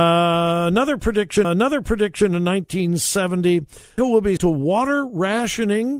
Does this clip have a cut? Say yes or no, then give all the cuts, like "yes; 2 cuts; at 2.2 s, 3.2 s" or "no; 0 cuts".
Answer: yes; 3 cuts; at 1.4 s, 4.0 s, 4.4 s